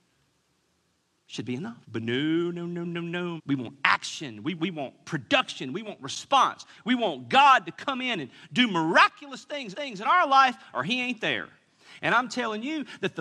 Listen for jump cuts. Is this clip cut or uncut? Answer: cut